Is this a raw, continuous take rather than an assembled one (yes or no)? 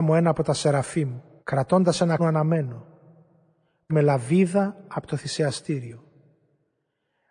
no